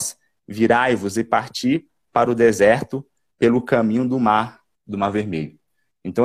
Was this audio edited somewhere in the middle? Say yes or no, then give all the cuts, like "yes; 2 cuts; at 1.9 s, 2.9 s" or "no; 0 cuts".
no; 0 cuts